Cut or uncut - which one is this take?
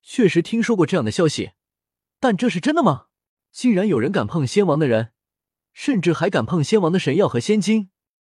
cut